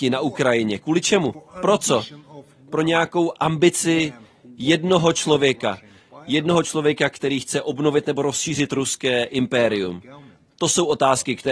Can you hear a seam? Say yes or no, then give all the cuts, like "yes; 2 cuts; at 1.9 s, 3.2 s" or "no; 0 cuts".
no; 0 cuts